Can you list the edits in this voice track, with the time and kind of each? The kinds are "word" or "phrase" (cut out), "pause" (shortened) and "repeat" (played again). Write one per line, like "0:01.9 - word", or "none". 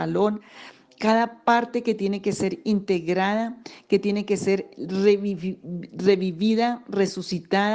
none